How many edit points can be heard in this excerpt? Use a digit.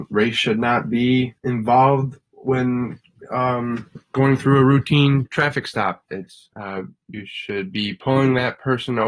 3